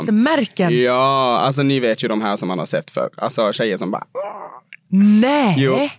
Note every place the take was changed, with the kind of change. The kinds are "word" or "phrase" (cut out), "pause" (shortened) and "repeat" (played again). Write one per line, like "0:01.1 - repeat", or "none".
none